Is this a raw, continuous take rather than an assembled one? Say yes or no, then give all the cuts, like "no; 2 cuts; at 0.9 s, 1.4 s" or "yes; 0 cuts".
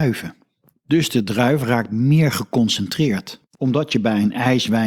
no; 1 cut; at 3.5 s